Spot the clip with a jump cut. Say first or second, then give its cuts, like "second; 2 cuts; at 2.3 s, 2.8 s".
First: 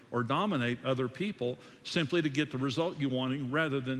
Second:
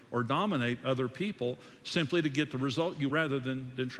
second; 1 cut; at 3.1 s